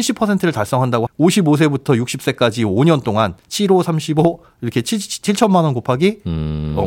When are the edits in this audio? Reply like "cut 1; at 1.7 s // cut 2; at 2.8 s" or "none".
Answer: cut 1; at 1.1 s // cut 2; at 3.4 s